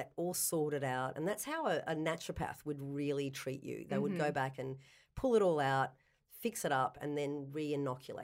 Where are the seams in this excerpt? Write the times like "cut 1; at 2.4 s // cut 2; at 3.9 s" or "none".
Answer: none